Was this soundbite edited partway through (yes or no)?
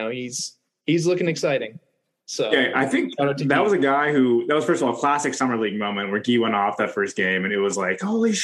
no